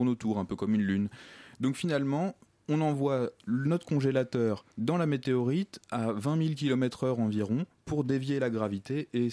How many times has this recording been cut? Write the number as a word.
one